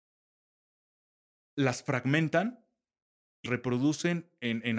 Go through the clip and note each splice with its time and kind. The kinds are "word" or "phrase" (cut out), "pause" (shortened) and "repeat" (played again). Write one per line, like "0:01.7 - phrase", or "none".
0:03.5 - word